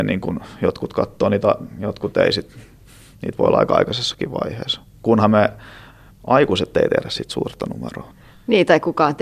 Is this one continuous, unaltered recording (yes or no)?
yes